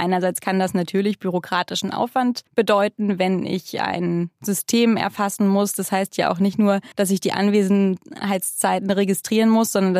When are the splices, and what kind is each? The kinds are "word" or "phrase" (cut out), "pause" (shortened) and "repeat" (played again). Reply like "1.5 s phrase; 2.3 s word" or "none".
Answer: 2.5 s pause; 6.9 s pause